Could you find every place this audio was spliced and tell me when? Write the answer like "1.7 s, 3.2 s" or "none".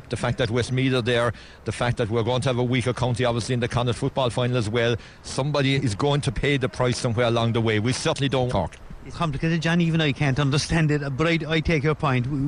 5.7 s, 8.5 s, 9.1 s